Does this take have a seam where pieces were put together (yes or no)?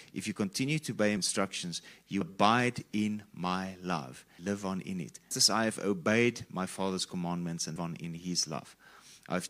yes